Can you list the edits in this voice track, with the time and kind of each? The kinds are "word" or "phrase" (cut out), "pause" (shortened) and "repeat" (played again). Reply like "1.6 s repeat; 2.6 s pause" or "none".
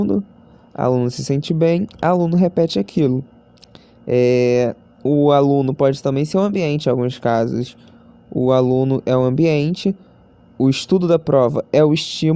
none

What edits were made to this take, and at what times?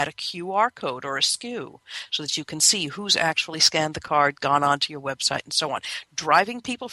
none

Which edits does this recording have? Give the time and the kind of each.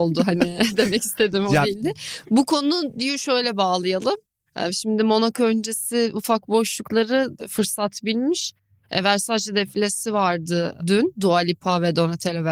none

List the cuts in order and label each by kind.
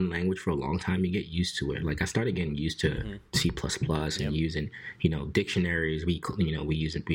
none

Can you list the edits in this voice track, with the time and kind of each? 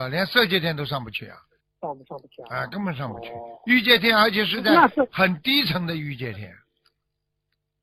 1.6 s pause

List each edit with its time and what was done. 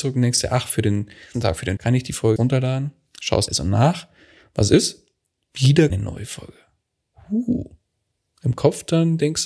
1.3 s word; 1.8 s word; 2.4 s word; 3.5 s word; 5.9 s word

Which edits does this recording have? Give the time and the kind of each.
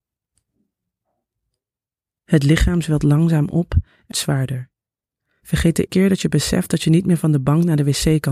4.1 s word; 5.9 s word

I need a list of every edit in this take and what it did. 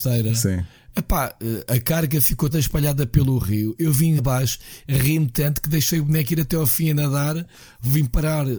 2.5 s word; 4.2 s word

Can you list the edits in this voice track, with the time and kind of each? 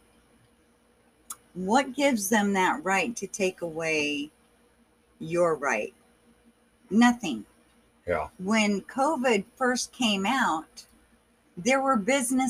none

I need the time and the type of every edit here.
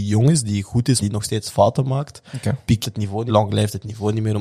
1.0 s word; 2.8 s word; 3.3 s word

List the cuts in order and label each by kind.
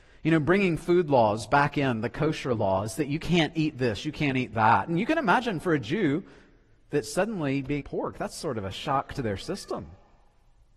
7.8 s phrase

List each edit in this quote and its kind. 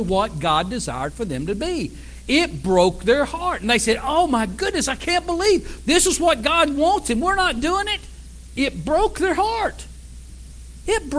none

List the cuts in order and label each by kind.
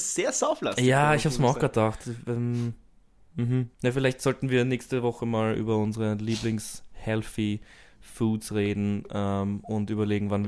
3.7 s pause

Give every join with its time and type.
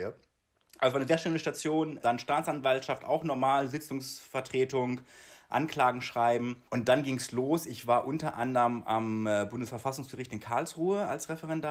6.7 s pause

